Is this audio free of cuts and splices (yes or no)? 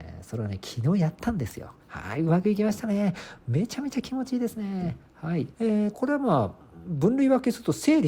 no